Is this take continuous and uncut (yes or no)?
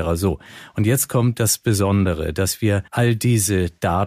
no